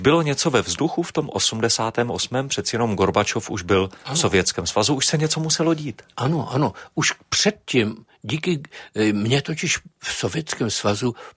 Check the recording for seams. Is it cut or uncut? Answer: uncut